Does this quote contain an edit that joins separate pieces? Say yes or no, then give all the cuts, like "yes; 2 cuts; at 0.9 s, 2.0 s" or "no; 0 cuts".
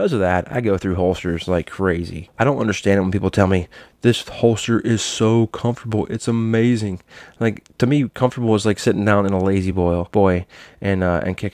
no; 0 cuts